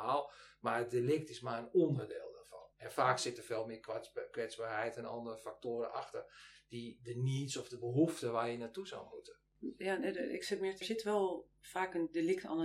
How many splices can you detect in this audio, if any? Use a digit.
3